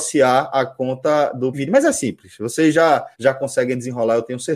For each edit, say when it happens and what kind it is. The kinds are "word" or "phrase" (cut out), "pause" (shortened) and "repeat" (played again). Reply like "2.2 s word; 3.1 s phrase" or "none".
1.5 s word; 3.1 s pause

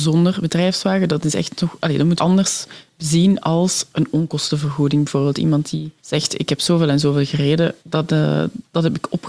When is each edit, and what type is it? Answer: 2.2 s phrase; 6.0 s pause; 7.8 s pause

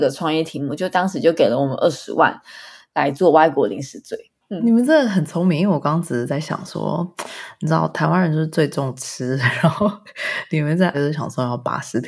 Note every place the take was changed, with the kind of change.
10.9 s word

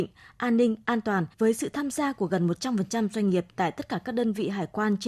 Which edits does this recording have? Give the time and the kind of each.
1.3 s pause

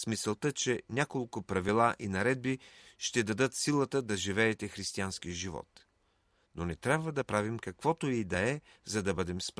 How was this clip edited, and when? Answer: none

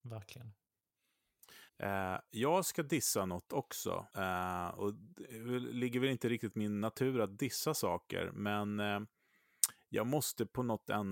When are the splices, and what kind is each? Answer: 1.7 s pause; 4.1 s pause

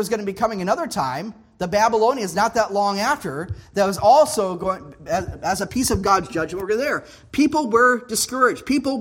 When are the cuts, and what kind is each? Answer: none

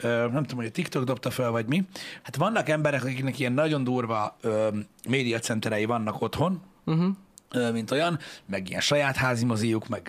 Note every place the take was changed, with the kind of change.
2.2 s word

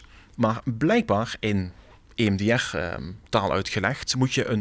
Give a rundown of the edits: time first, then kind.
3.3 s pause

